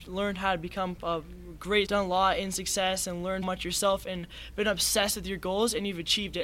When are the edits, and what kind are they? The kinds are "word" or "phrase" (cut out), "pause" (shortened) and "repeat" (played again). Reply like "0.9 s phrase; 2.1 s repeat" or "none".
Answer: 1.8 s phrase; 3.4 s word